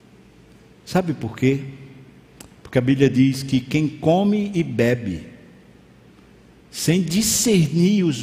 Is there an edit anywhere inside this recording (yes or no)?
no